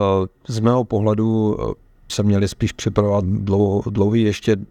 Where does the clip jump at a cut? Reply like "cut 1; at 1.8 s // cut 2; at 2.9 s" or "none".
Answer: cut 1; at 2.1 s // cut 2; at 3.2 s